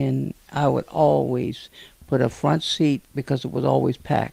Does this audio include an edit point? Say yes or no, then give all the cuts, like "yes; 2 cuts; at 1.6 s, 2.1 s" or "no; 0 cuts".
yes; 1 cut; at 3.0 s